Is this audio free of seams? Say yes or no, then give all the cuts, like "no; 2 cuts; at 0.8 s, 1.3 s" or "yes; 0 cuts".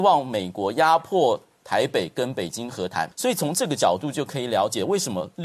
no; 1 cut; at 3.1 s